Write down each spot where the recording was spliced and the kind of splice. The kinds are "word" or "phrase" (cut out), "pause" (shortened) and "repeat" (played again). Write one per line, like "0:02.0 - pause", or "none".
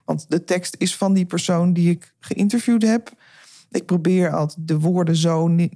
none